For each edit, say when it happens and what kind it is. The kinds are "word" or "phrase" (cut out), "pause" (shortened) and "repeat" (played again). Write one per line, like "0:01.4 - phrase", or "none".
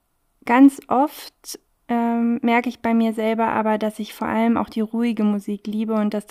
none